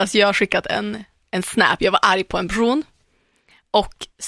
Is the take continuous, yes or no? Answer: yes